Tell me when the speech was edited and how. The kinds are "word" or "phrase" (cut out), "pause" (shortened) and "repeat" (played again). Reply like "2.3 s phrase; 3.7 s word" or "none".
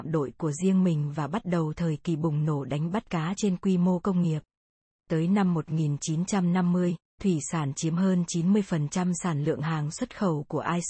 4.9 s pause